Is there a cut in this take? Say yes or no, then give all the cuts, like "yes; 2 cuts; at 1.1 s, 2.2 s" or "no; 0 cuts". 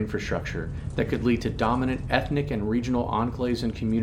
no; 0 cuts